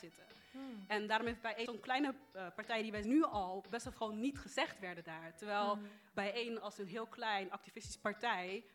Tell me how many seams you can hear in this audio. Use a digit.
3